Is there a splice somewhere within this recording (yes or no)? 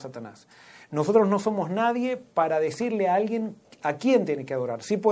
no